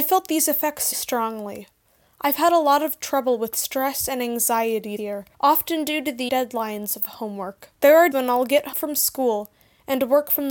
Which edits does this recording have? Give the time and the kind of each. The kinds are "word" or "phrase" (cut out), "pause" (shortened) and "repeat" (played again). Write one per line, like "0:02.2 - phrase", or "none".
0:00.9 - word
0:05.0 - word
0:05.3 - pause
0:06.3 - phrase
0:07.7 - pause
0:08.1 - word
0:08.7 - word